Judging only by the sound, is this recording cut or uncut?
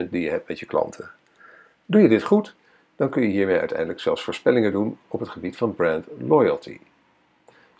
uncut